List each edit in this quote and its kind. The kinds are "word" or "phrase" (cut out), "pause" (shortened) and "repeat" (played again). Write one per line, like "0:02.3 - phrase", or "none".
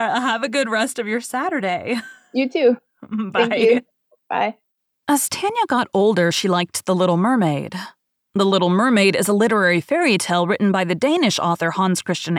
0:04.9 - pause